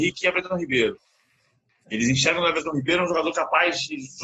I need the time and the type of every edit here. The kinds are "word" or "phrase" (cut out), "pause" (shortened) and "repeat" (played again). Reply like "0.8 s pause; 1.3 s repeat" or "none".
none